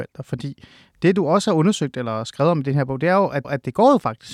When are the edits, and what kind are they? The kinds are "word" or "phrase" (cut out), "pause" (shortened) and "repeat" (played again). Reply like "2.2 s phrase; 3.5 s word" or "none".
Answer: 3.4 s repeat